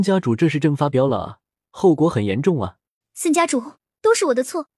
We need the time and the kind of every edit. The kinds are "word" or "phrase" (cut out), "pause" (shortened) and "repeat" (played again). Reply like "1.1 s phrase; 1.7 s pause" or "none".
3.0 s pause